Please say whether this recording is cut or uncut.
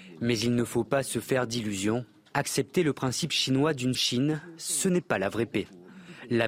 cut